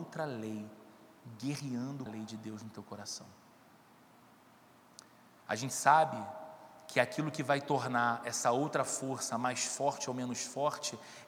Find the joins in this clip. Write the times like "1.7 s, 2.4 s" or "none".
2.1 s

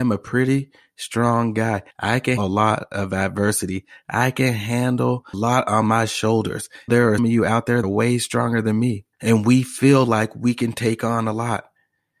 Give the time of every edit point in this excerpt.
1.9 s, 2.4 s, 5.3 s, 6.9 s, 7.2 s, 7.8 s, 9.1 s

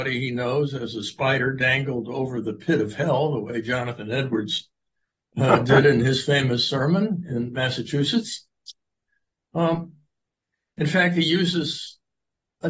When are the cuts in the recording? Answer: none

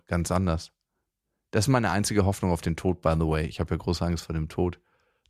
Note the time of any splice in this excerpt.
none

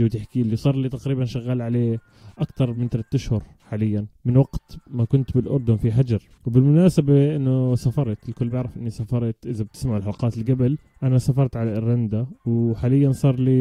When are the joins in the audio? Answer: none

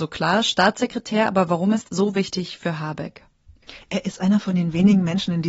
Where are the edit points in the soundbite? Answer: 1.8 s

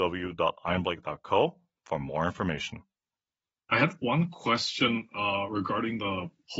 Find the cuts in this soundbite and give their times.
none

